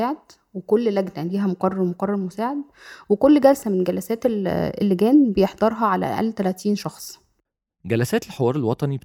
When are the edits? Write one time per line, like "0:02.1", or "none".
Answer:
none